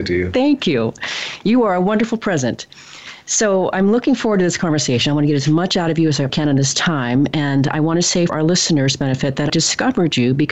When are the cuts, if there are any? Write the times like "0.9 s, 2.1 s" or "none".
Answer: 6.3 s, 8.3 s, 9.5 s

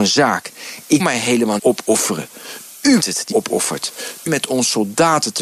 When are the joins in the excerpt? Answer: 1.0 s, 1.6 s, 3.0 s, 3.3 s, 4.3 s

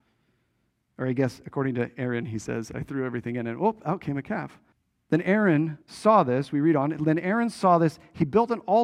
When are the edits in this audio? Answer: 4.7 s, 5.8 s

